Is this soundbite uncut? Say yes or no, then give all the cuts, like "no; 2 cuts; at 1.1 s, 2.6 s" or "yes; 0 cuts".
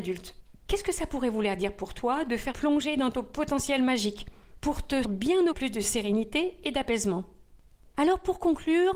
no; 3 cuts; at 2.5 s, 5.0 s, 5.5 s